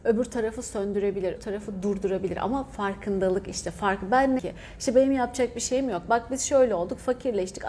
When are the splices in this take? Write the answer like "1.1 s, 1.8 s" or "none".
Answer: 1.4 s, 4.4 s